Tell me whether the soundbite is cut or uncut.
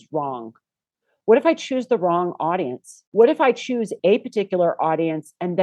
cut